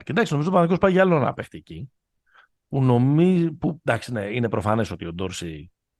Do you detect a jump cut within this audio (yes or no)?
no